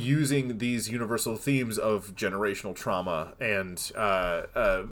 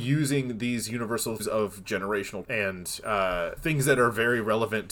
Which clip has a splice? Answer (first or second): second